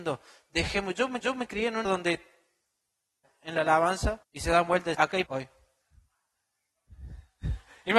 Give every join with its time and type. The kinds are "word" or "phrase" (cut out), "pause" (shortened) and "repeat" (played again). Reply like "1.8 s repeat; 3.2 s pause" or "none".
1.2 s repeat; 1.8 s word; 3.2 s word; 4.2 s pause; 4.9 s word; 5.3 s word